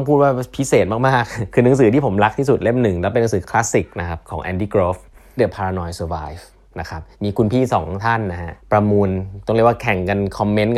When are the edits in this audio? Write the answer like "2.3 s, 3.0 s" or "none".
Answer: 5.4 s, 7.1 s, 8.6 s